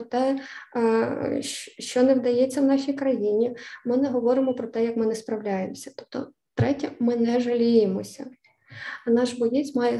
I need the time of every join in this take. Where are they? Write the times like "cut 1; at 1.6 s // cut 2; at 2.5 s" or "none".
none